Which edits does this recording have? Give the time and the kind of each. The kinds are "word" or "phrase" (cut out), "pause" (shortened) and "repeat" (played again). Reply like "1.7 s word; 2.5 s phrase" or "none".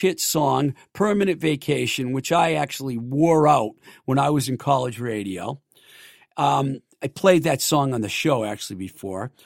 none